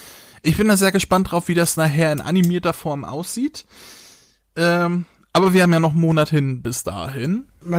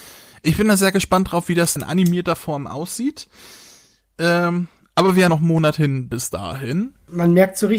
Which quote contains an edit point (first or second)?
second